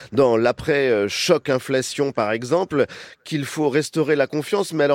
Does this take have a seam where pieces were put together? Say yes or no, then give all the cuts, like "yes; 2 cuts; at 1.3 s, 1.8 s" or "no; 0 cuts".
no; 0 cuts